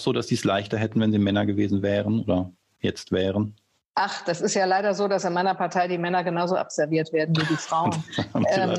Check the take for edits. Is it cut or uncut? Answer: uncut